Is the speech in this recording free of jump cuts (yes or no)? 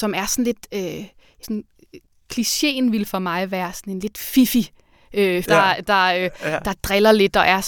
no